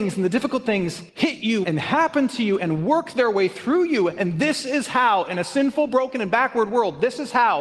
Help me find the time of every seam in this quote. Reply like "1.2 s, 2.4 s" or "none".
1.1 s, 1.6 s